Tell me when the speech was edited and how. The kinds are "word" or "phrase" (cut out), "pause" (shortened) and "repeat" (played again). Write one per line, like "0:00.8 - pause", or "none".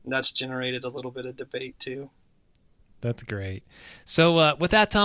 none